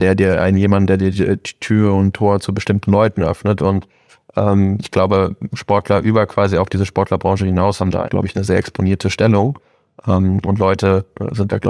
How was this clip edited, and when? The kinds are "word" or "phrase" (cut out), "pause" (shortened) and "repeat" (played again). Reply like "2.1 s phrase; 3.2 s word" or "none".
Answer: 8.0 s word